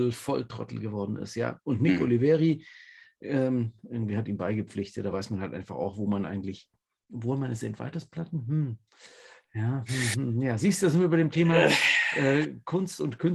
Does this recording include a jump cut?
no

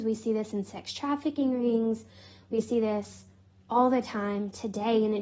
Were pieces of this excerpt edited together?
no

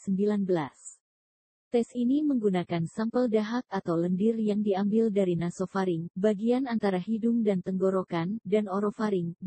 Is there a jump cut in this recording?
no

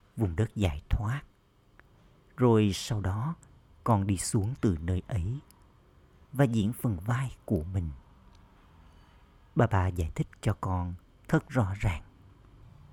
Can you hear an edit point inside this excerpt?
no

